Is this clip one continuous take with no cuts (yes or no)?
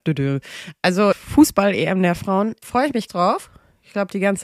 no